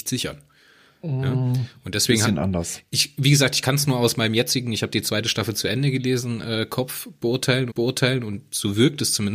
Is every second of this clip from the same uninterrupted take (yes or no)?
no